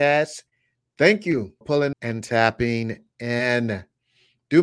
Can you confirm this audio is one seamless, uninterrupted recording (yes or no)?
no